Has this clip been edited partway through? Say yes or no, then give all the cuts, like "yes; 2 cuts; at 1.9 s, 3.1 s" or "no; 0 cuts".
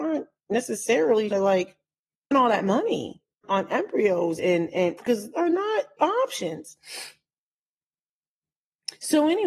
yes; 7 cuts; at 1.3 s, 2.3 s, 3.4 s, 4.4 s, 5.0 s, 5.3 s, 6.0 s